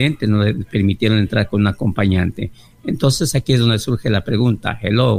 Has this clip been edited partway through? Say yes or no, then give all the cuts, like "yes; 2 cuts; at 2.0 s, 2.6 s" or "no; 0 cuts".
no; 0 cuts